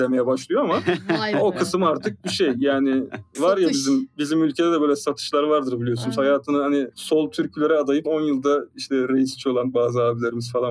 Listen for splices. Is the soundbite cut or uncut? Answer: cut